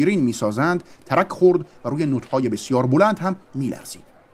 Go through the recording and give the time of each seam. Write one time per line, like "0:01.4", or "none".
none